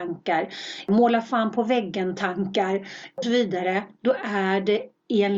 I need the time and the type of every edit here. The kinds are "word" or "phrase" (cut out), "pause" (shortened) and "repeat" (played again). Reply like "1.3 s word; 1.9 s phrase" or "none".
3.2 s word